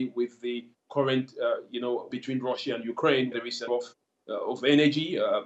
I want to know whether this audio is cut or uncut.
cut